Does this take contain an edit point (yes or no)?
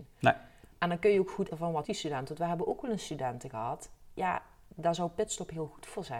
yes